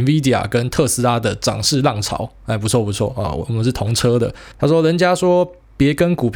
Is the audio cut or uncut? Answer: cut